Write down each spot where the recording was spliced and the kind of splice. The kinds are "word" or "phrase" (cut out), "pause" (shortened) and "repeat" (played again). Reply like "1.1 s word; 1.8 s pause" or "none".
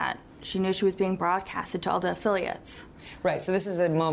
none